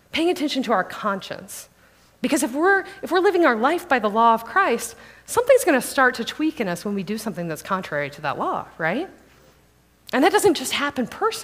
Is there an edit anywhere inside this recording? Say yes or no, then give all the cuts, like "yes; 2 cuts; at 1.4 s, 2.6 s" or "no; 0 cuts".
no; 0 cuts